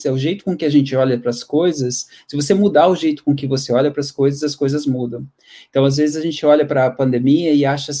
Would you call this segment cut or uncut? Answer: uncut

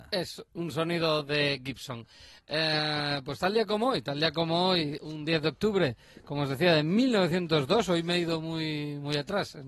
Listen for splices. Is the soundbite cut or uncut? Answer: cut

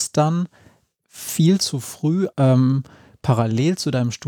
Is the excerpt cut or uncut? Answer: cut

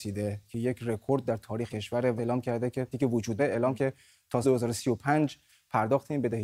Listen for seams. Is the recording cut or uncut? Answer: cut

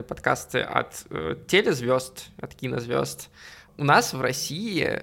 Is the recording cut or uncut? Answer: uncut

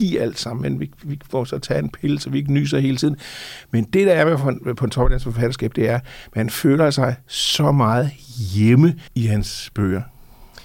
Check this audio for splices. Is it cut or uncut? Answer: cut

